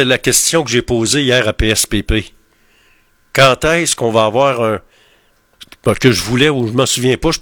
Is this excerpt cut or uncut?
uncut